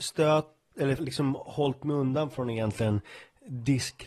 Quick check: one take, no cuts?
no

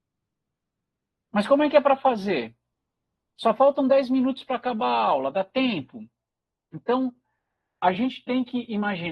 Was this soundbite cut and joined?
no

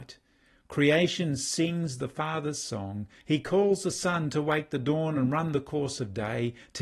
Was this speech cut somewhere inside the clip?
no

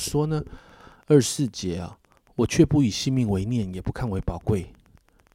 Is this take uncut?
yes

